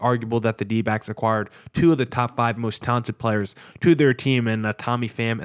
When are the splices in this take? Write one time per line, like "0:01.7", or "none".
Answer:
none